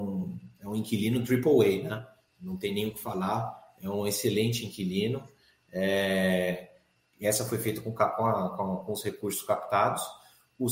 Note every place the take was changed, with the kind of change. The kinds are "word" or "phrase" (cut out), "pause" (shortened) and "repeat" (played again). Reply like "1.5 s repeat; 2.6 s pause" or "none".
none